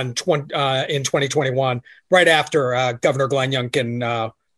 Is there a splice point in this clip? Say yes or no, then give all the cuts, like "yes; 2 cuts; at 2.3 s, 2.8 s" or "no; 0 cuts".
no; 0 cuts